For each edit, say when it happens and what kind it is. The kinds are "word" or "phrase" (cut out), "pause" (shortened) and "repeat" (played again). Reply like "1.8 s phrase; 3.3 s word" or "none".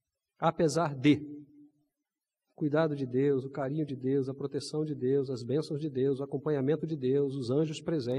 none